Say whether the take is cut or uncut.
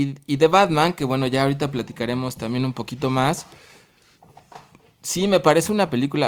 uncut